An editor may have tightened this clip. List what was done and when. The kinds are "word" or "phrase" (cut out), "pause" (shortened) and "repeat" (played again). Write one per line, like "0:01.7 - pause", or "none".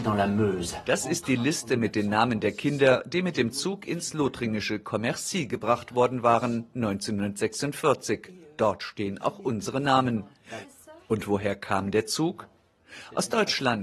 none